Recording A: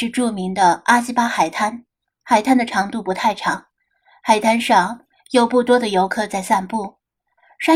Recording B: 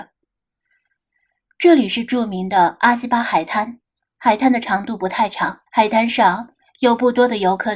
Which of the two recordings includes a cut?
B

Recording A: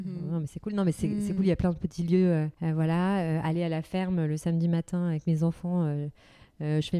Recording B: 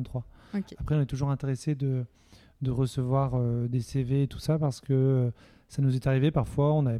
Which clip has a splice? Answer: A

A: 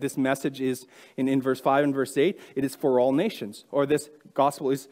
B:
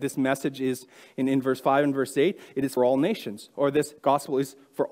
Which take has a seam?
B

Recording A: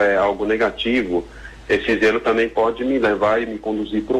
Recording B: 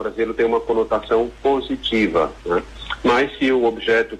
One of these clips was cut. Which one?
B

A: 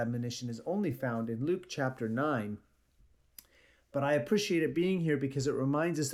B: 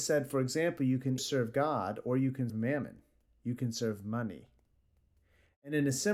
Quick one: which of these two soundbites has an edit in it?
B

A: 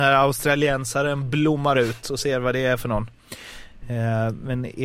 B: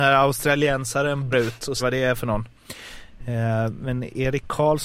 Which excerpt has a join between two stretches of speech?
B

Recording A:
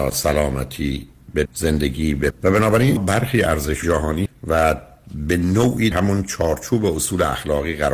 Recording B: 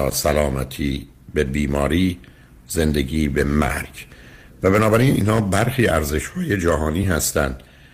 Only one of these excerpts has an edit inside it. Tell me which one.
A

